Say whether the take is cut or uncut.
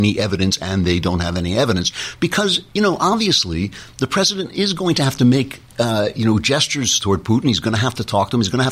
cut